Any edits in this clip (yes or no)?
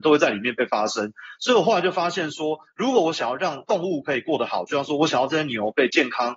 no